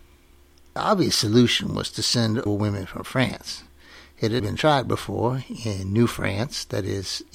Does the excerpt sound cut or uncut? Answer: cut